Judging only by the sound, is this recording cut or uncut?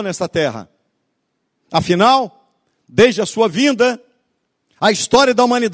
uncut